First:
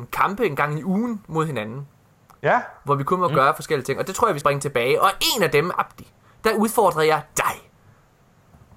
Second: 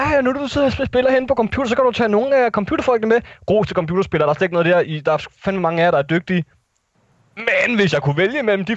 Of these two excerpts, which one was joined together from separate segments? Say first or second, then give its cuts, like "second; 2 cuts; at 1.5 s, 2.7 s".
first; 1 cut; at 4.4 s